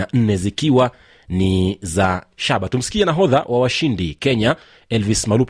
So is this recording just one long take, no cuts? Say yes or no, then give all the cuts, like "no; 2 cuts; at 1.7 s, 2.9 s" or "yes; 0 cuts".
yes; 0 cuts